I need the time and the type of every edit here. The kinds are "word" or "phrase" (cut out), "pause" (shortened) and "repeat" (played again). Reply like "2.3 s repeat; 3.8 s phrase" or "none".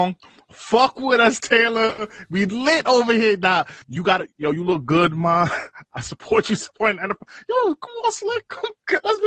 3.8 s pause